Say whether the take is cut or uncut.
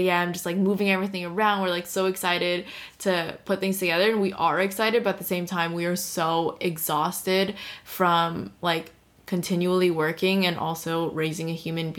uncut